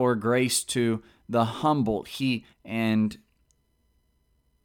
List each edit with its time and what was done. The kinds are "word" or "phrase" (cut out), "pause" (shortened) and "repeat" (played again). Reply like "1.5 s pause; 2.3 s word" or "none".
2.5 s phrase

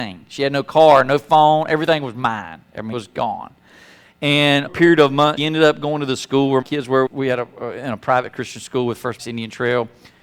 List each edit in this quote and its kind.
2.9 s word; 4.7 s word; 5.4 s word; 6.6 s word; 7.1 s word; 9.2 s word

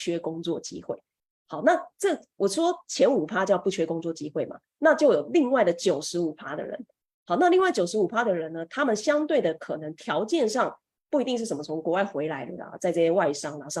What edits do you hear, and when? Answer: none

